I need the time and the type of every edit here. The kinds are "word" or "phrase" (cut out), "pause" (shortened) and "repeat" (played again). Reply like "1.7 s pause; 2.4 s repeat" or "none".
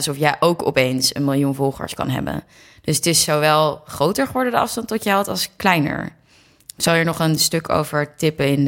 none